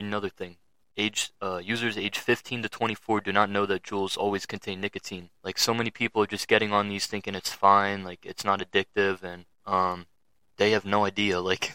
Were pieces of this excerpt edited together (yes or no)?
yes